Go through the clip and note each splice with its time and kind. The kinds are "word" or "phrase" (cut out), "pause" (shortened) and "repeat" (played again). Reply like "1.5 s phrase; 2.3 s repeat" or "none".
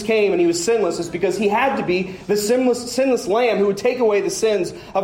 none